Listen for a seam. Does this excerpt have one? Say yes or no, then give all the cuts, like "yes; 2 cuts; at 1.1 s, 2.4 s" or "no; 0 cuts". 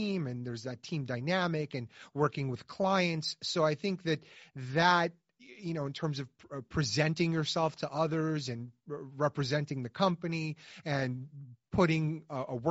no; 0 cuts